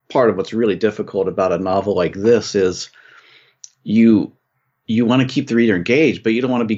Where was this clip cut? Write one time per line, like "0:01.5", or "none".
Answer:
none

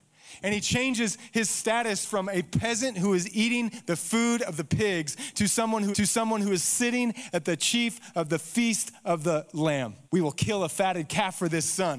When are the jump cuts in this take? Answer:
0:05.9
0:10.0

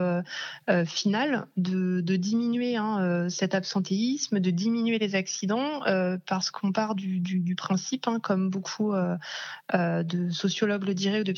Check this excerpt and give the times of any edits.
none

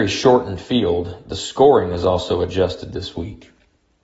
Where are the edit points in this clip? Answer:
none

